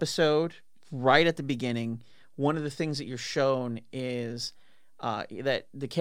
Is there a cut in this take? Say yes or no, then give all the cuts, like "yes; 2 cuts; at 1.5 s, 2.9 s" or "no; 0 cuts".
no; 0 cuts